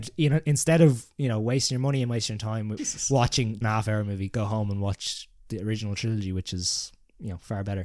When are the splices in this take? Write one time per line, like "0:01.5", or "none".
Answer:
0:02.8
0:03.6